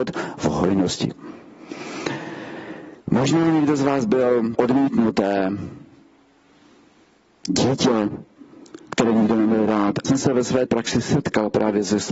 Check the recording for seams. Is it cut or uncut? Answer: cut